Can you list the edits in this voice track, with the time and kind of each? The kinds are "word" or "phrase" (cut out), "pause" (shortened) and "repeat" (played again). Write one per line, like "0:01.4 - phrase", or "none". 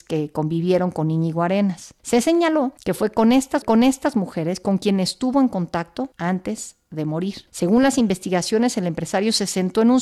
0:03.6 - repeat